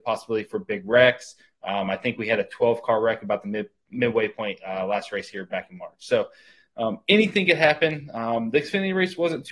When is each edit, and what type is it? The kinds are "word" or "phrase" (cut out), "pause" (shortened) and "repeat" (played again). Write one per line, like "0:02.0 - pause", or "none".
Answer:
none